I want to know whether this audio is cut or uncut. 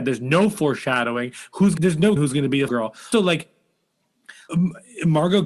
cut